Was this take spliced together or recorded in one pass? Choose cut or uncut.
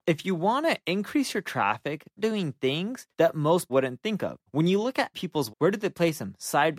cut